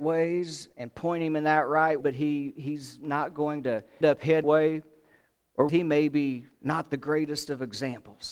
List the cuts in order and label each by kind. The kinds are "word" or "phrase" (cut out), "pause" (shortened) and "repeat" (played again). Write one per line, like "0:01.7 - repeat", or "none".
0:02.0 - word
0:04.0 - word
0:04.4 - word
0:05.7 - word
0:06.5 - pause